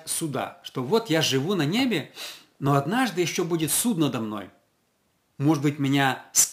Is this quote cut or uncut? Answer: uncut